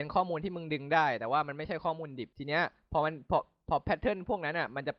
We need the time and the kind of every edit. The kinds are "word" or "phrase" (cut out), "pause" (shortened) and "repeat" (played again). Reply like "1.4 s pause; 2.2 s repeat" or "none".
2.3 s pause